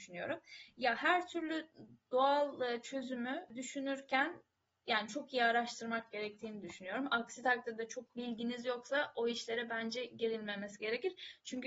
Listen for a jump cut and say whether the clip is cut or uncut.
uncut